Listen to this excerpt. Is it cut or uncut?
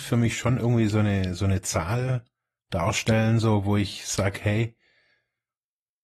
uncut